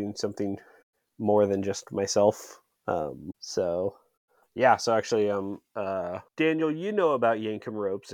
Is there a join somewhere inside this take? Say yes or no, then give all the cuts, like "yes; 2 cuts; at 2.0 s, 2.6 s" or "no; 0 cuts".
yes; 2 cuts; at 3.3 s, 6.3 s